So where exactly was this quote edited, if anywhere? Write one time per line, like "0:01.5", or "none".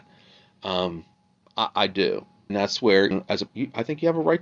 0:01.1
0:02.5
0:03.1
0:03.5